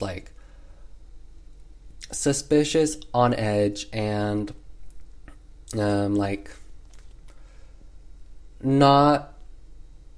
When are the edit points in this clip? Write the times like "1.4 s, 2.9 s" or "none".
none